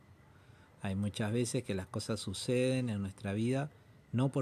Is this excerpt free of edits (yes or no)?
yes